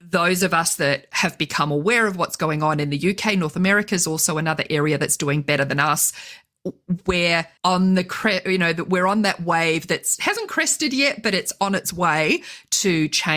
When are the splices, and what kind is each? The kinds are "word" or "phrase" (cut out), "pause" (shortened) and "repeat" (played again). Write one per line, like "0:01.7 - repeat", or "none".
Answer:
0:07.6 - pause